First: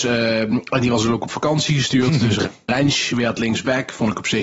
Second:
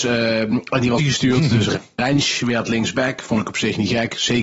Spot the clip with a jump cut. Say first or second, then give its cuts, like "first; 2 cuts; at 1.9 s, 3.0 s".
second; 1 cut; at 1.0 s